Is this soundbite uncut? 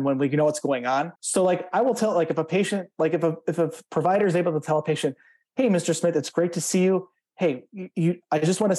no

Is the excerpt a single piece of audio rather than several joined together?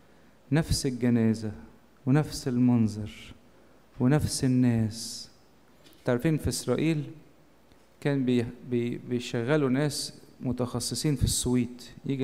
yes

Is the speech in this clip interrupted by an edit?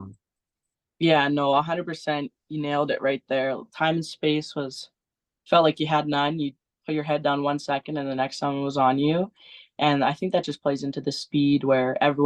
no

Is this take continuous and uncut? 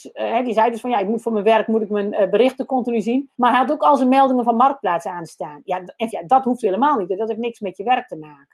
no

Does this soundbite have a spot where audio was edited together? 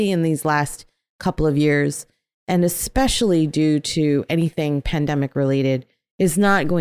no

